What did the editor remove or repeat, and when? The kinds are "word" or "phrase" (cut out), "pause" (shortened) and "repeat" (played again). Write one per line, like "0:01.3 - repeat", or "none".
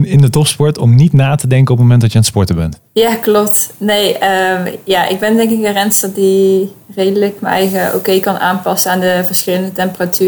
0:02.9 - pause